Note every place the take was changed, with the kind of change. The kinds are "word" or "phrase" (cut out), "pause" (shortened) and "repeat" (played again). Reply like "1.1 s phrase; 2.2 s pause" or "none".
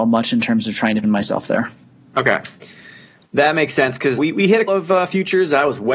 1.0 s word; 4.2 s word; 4.7 s word